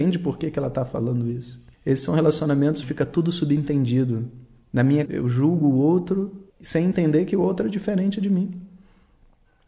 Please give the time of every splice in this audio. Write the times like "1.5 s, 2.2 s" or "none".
1.7 s, 2.8 s, 5.1 s, 6.5 s

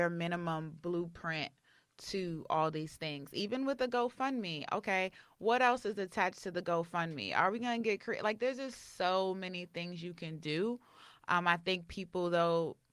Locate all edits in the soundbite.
none

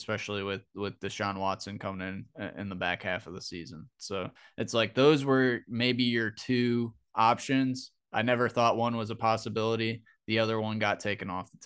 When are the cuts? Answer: 4.4 s

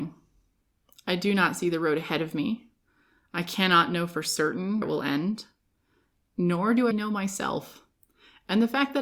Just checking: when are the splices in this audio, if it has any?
4.8 s, 6.9 s

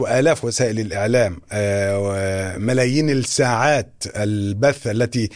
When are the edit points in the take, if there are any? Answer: none

